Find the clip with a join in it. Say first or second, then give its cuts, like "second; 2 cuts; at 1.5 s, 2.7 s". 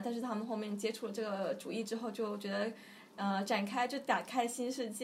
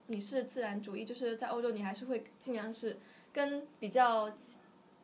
second; 1 cut; at 3.7 s